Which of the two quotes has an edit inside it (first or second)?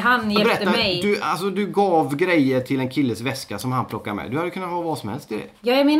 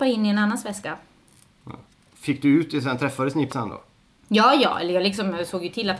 second